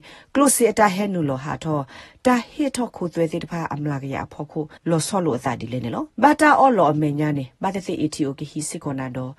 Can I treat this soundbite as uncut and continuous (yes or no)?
no